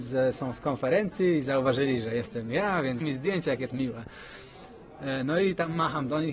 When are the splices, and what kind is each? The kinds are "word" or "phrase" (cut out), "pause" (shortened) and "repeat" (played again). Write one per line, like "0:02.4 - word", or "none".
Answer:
0:03.0 - word
0:03.7 - word

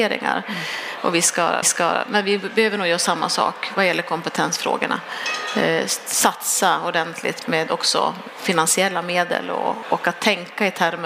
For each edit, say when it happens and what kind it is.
0:01.6 - repeat
0:07.4 - word
0:09.8 - word

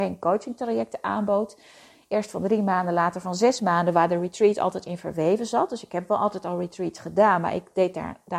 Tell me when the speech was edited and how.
none

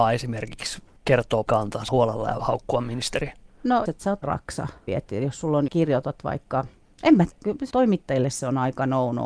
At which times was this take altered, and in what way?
0:01.5 - word
0:01.9 - word
0:02.4 - word
0:03.9 - word
0:04.2 - word
0:04.9 - word
0:05.7 - word
0:07.3 - word
0:07.7 - word

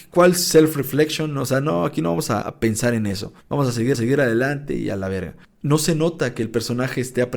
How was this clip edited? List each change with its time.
0:02.4 - word
0:03.4 - pause
0:03.9 - repeat

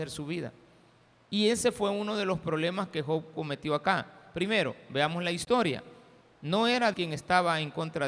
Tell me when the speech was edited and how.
0:06.9 - word

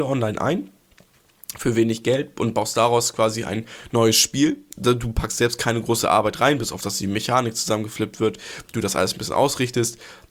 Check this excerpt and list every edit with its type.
none

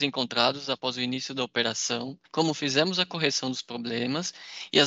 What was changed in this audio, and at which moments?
0:02.3 - pause

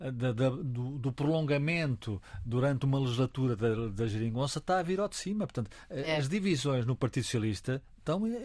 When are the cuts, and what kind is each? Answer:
none

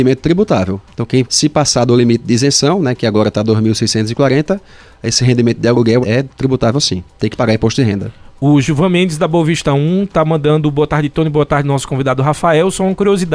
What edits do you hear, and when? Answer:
0:01.3 - phrase
0:06.0 - word

